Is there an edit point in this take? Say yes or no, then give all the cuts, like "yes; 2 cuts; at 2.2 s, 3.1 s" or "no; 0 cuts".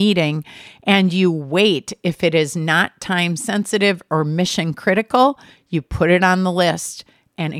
no; 0 cuts